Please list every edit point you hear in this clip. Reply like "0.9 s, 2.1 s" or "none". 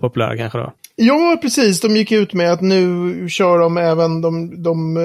none